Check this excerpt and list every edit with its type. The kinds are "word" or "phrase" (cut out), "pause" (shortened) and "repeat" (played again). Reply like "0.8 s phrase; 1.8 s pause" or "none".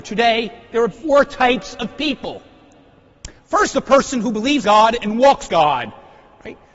0.9 s word; 3.7 s word; 4.6 s word; 5.5 s word